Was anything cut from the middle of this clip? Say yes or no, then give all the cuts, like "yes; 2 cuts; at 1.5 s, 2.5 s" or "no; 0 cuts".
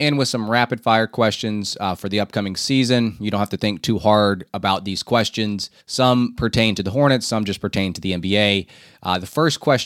yes; 1 cut; at 5.8 s